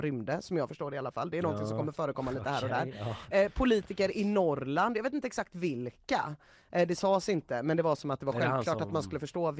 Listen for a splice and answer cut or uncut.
uncut